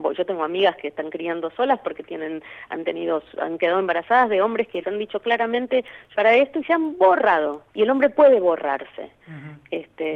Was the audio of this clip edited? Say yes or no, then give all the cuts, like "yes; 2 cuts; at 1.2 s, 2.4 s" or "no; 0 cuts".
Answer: yes; 3 cuts; at 4.8 s, 6.1 s, 7.7 s